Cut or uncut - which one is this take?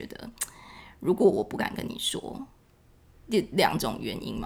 uncut